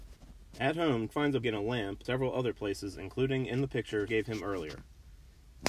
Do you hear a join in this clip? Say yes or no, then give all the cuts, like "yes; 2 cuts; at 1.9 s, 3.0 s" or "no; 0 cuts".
yes; 4 cuts; at 1.1 s, 1.4 s, 2.0 s, 4.1 s